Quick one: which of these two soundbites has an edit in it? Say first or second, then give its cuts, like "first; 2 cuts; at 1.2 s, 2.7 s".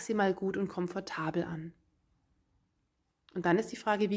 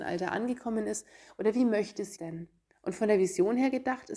second; 2 cuts; at 2.2 s, 2.7 s